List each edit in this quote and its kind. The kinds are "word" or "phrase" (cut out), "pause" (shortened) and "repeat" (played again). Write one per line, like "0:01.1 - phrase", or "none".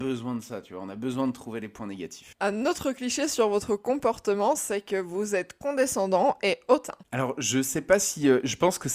0:07.0 - pause